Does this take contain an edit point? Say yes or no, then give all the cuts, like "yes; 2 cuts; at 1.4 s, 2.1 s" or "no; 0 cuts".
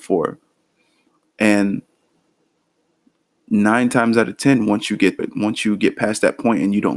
yes; 1 cut; at 5.2 s